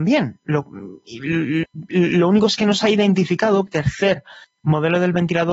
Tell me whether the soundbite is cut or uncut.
cut